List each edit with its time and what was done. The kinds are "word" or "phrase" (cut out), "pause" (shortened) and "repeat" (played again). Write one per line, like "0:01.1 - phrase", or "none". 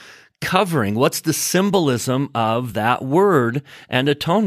none

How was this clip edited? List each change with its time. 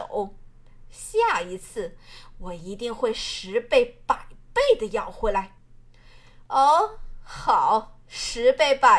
none

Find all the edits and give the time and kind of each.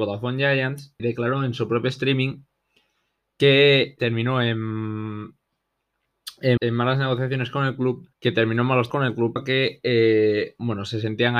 0:01.0 - word
0:04.0 - word
0:06.6 - word
0:08.1 - pause
0:08.9 - word
0:09.4 - word

